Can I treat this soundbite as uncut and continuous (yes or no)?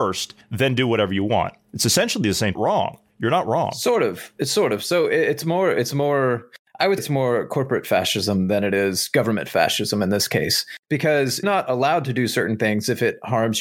no